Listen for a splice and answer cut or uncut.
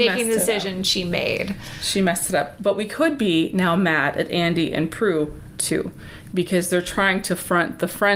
uncut